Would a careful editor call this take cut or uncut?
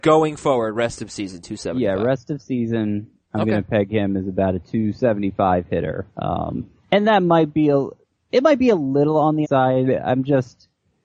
cut